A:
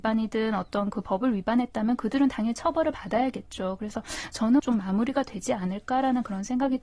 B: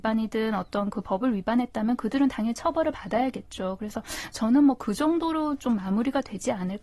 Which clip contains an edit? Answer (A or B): A